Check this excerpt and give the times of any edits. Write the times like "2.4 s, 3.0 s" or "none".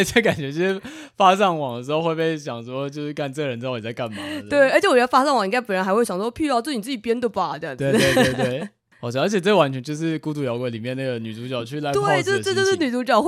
8.9 s